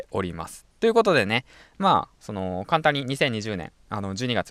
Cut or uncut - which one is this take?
uncut